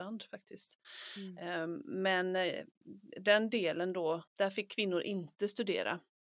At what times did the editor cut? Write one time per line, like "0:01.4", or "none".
0:04.3